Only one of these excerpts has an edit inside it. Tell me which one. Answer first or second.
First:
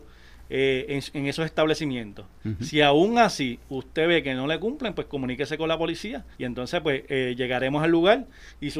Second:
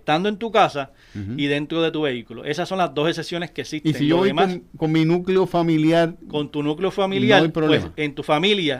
first